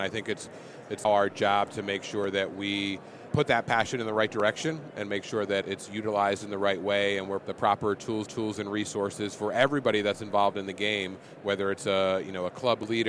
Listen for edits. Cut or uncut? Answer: cut